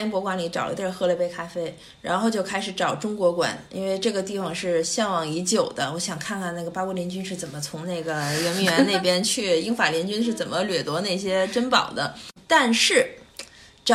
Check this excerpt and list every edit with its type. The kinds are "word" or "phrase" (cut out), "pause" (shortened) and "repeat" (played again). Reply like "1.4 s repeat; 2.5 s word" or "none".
none

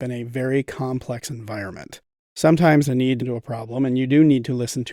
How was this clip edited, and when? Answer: 2.8 s word; 3.2 s word

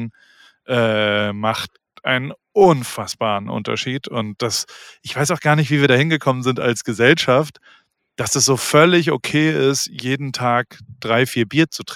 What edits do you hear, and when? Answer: none

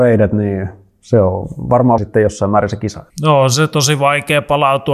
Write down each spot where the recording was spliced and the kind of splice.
2.0 s phrase; 3.1 s pause

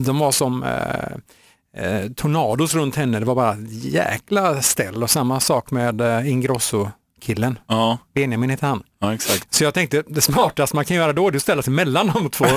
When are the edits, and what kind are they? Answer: none

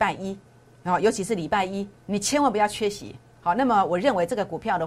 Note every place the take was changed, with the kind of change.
2.0 s pause

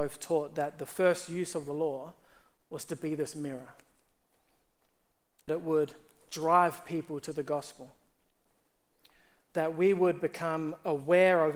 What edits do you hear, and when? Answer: 5.5 s word

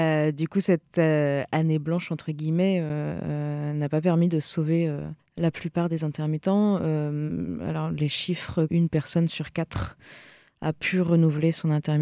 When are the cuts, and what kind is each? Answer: 5.2 s pause; 8.7 s phrase

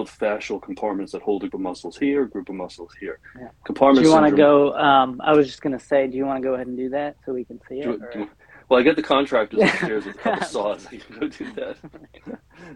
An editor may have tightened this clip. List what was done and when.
1.5 s word

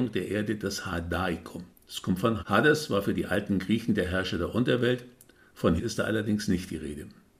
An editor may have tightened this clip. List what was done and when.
1.7 s pause; 2.4 s word; 5.8 s word

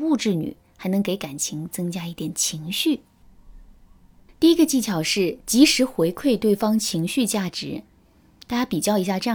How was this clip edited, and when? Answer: none

